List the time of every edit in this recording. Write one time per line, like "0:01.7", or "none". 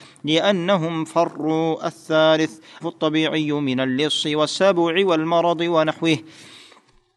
0:02.8

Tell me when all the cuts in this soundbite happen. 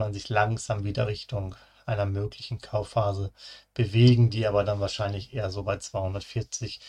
none

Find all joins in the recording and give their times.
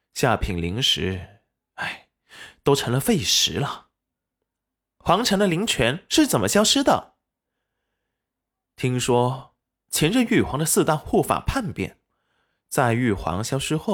none

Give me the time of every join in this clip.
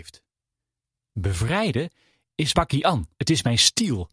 0:02.5
0:03.1

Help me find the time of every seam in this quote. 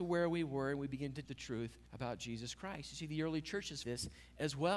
0:01.2
0:01.9
0:03.8

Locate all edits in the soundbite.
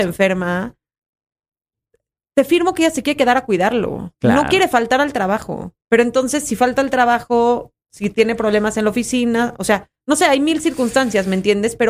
0:04.1
0:05.8
0:07.8

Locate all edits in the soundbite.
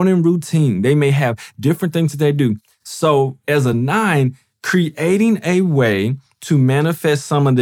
none

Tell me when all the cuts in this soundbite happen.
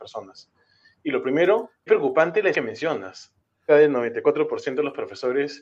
0:01.9
0:02.5
0:03.7

